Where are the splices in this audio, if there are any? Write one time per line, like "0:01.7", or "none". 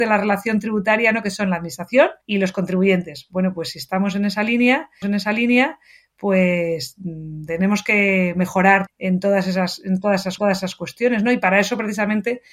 0:02.2
0:05.0
0:08.9
0:10.4